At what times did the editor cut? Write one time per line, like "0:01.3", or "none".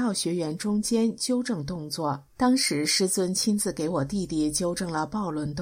0:02.3